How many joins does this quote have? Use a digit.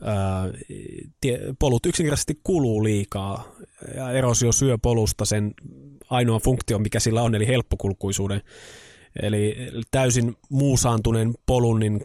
0